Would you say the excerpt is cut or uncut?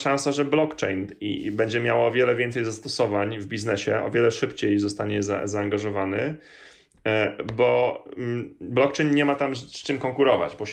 uncut